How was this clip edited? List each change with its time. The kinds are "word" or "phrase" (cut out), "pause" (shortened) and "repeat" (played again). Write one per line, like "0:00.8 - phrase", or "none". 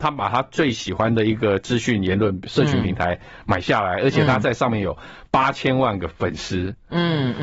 0:06.1 - pause